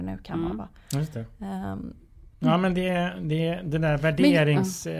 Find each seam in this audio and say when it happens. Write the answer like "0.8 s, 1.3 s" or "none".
2.3 s